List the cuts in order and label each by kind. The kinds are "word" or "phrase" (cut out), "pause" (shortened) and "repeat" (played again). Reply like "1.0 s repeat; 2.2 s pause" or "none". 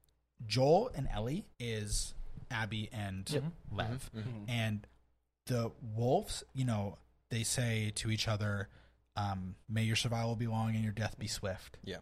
1.5 s pause; 9.6 s pause

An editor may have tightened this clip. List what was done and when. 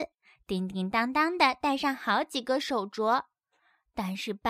none

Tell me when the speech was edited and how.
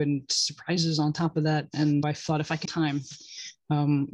2.0 s word; 2.6 s phrase

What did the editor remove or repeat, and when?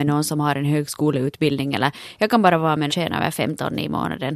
2.9 s phrase

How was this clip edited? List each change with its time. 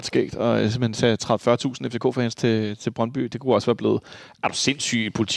none

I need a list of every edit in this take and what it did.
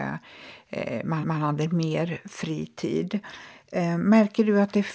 1.2 s repeat

